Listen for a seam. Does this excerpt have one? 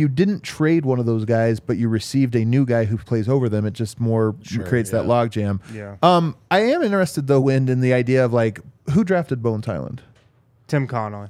no; 0 cuts

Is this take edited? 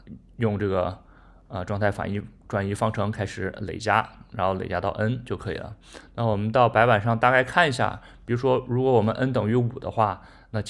no; 0 cuts

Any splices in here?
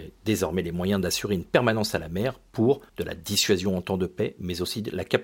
yes; 1 cut; at 2.9 s

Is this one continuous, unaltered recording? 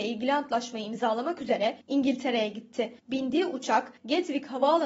no; 3 cuts; at 1.8 s, 3.0 s, 4.0 s

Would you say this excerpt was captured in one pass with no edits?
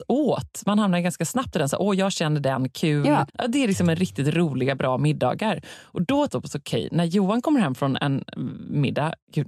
no; 2 cuts; at 3.3 s, 6.3 s

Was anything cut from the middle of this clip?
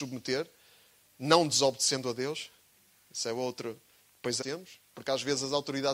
yes; 1 cut; at 4.4 s

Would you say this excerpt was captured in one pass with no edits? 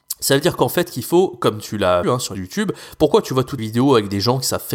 no; 3 cuts; at 2.0 s, 2.3 s, 3.6 s

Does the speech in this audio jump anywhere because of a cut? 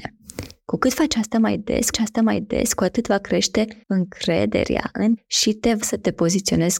yes; 4 cuts; at 1.9 s, 3.8 s, 5.2 s, 5.8 s

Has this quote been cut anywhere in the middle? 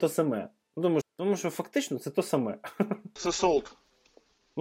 yes; 2 cuts; at 1.0 s, 3.2 s

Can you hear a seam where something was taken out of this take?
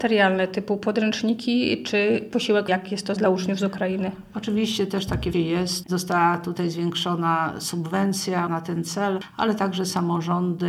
yes; 5 cuts; at 2.7 s, 3.2 s, 5.3 s, 5.8 s, 8.5 s

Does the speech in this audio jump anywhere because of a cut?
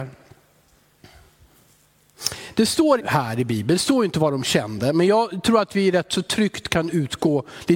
yes; 1 cut; at 3.0 s

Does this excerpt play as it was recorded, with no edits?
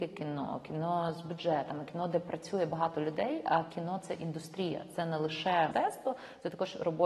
no; 1 cut; at 5.7 s

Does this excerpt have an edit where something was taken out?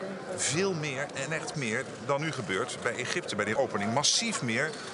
yes; 2 cuts; at 1.5 s, 3.6 s

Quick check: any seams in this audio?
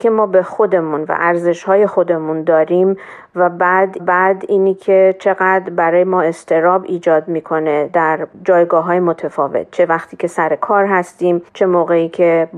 yes; 2 cuts; at 4.0 s, 11.5 s

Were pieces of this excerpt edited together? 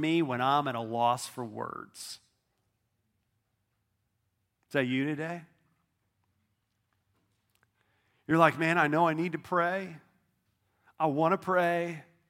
no; 0 cuts

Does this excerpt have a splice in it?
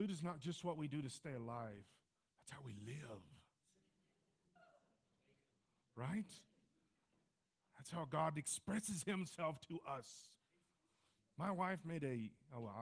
no; 0 cuts

